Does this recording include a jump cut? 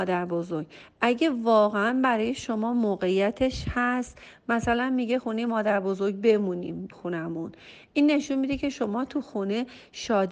yes; 1 cut; at 6.9 s

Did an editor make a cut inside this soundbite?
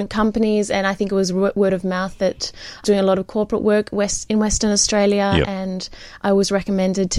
yes; 1 cut; at 2.8 s

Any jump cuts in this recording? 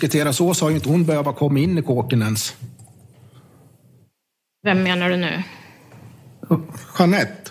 no; 0 cuts

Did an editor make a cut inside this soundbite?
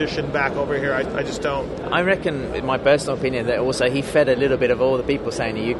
yes; 1 cut; at 1.0 s

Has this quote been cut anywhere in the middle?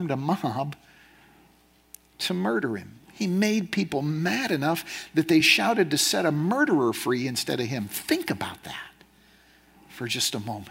no; 0 cuts

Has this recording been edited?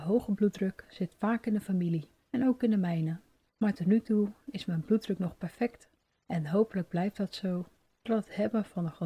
no; 0 cuts

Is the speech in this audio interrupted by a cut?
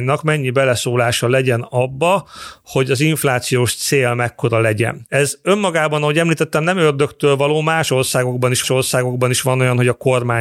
yes; 1 cut; at 8.6 s

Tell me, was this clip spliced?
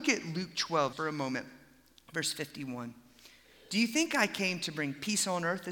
yes; 1 cut; at 0.9 s

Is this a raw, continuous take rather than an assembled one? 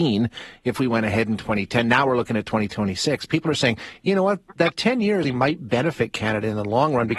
no; 1 cut; at 5.2 s

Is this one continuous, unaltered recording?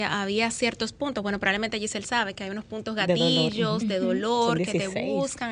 yes; 0 cuts

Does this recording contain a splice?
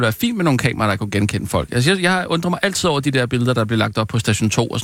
no; 0 cuts

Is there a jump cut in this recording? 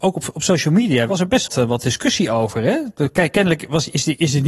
yes; 1 cut; at 1.5 s

